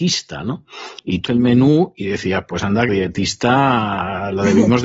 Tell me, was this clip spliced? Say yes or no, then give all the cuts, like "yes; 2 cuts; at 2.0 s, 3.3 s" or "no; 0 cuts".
yes; 2 cuts; at 1.3 s, 2.9 s